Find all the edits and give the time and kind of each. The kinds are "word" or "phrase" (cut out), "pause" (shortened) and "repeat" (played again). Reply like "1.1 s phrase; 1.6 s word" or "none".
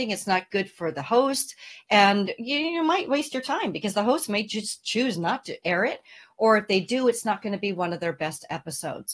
none